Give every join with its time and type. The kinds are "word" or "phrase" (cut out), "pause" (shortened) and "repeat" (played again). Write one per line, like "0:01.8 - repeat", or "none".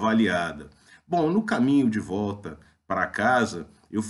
none